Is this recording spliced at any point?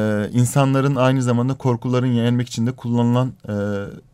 no; 0 cuts

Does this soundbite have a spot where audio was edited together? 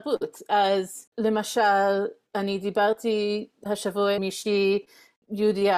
yes; 1 cut; at 4.2 s

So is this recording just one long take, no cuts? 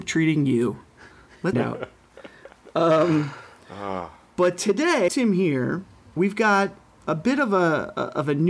no; 3 cuts; at 1.5 s, 5.1 s, 6.2 s

